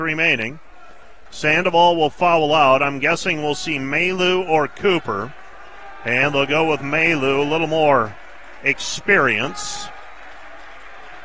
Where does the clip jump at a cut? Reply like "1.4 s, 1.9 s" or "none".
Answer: none